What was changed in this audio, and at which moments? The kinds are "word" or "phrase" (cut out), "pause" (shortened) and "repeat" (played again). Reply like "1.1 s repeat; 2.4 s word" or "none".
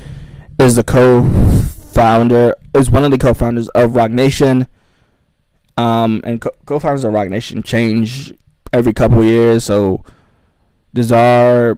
none